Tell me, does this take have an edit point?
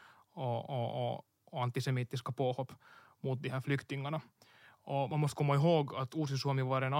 no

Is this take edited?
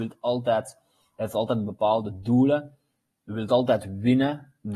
no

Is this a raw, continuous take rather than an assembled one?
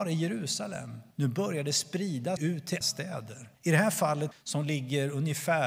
no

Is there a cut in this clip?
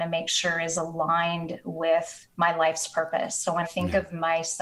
yes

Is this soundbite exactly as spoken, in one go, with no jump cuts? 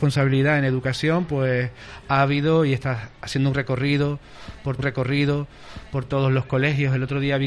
no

